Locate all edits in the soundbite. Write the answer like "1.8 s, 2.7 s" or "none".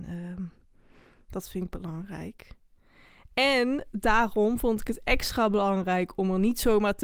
none

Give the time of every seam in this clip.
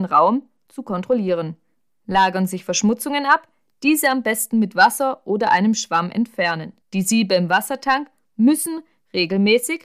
6.8 s

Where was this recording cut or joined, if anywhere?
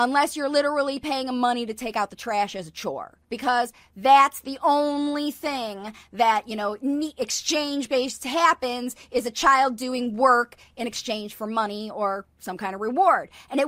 3.2 s

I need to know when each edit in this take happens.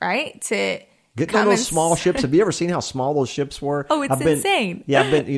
none

